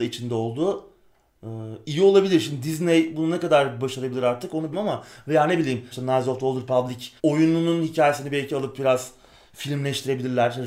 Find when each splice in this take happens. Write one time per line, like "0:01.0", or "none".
0:04.7
0:05.9
0:07.2